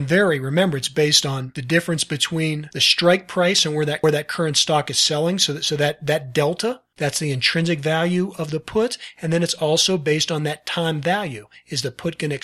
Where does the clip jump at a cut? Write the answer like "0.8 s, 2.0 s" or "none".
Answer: none